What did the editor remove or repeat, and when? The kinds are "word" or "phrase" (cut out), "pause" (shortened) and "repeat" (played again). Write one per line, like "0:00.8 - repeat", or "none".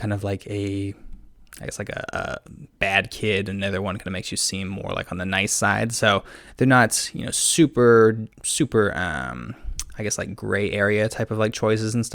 0:08.3 - pause